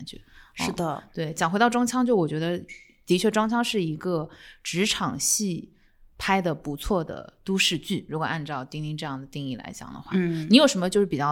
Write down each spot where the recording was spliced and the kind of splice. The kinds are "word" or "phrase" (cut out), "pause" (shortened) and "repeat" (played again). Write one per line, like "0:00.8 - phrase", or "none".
none